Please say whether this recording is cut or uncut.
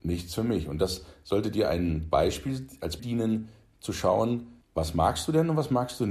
cut